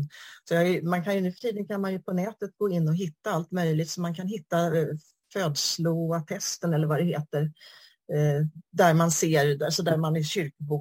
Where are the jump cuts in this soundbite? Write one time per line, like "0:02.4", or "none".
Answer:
none